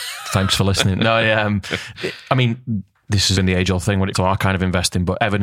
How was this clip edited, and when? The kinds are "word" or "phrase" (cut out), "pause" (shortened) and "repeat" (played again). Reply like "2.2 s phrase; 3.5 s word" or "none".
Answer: 3.3 s word; 4.1 s word